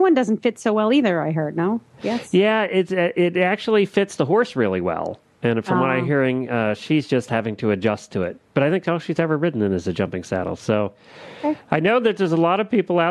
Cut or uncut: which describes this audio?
uncut